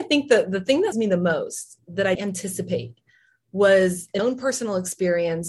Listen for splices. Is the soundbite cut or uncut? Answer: cut